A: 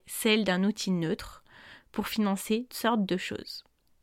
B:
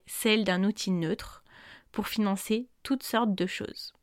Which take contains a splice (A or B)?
A